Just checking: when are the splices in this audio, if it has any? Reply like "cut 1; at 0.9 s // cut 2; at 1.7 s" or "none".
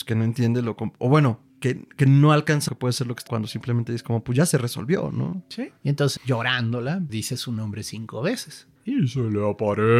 cut 1; at 1.5 s // cut 2; at 2.7 s // cut 3; at 3.3 s // cut 4; at 5.8 s // cut 5; at 6.2 s // cut 6; at 7.1 s // cut 7; at 8.8 s